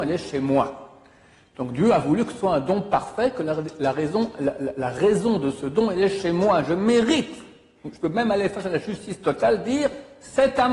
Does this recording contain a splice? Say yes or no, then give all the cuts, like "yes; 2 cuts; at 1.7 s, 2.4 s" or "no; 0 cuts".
no; 0 cuts